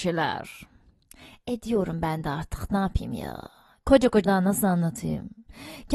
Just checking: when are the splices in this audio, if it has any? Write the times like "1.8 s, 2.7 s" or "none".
4.2 s